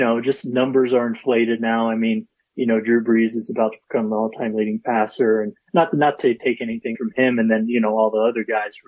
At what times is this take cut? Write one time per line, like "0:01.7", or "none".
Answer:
0:06.4
0:06.9